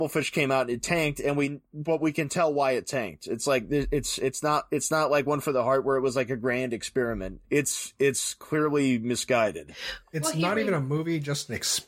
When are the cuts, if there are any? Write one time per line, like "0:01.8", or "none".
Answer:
0:07.4